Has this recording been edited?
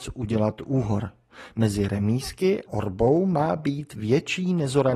yes; 1 cut; at 2.7 s

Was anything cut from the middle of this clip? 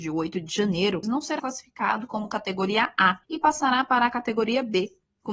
yes; 3 cuts; at 1.0 s, 1.4 s, 3.2 s

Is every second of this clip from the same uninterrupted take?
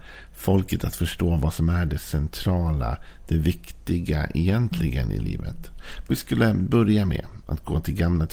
no; 1 cut; at 6.1 s

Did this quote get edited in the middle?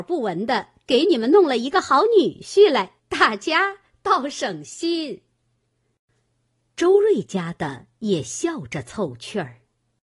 yes; 1 cut; at 3.0 s

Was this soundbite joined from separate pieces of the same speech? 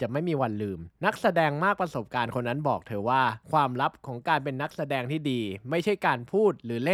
yes; 2 cuts; at 0.9 s, 3.4 s

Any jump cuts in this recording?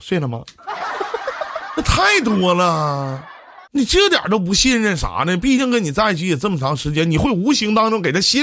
yes; 1 cut; at 3.6 s

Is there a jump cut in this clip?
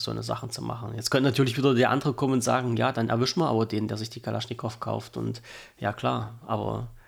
no; 0 cuts

